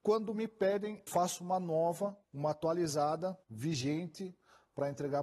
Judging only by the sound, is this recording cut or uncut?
cut